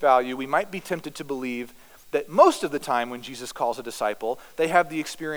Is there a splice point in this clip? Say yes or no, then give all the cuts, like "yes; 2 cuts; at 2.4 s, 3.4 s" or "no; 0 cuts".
no; 0 cuts